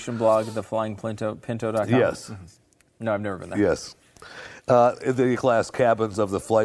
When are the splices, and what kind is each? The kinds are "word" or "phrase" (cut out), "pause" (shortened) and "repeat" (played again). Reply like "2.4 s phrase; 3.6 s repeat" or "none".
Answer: 5.3 s word